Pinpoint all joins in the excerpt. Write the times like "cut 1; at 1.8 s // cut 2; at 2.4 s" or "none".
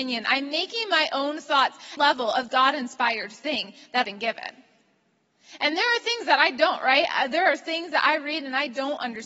cut 1; at 2.0 s // cut 2; at 2.5 s // cut 3; at 4.0 s